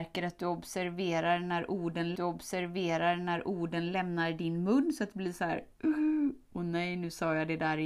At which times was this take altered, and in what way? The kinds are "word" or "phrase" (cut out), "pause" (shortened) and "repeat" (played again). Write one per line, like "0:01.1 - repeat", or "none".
0:02.2 - repeat